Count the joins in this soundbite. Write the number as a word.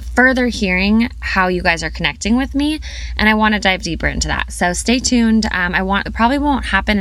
one